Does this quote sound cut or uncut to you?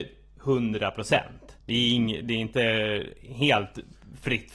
cut